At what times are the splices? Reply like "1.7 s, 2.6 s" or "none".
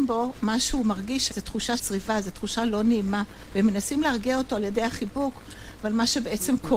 1.3 s, 1.8 s